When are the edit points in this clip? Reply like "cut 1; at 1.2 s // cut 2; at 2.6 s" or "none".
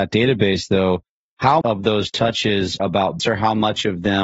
cut 1; at 1.6 s // cut 2; at 2.8 s // cut 3; at 3.2 s